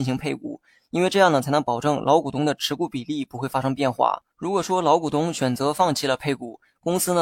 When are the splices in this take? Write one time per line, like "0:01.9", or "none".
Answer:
0:04.3